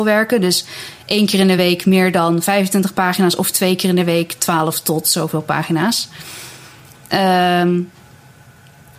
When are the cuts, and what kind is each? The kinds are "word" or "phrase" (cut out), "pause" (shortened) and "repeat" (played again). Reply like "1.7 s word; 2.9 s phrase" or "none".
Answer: none